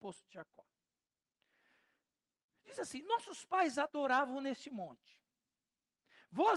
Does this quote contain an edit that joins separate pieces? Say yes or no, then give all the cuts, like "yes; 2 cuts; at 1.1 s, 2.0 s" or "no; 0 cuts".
no; 0 cuts